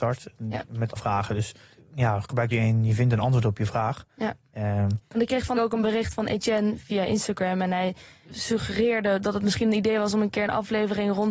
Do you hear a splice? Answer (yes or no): yes